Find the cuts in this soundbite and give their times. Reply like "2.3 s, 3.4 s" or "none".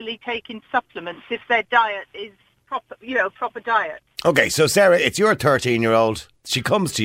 2.6 s